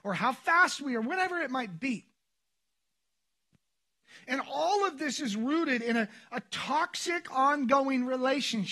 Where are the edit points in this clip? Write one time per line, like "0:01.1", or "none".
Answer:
none